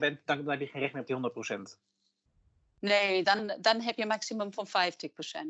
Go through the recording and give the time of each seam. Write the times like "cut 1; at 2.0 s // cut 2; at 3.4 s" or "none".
none